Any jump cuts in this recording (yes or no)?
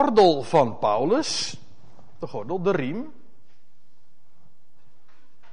no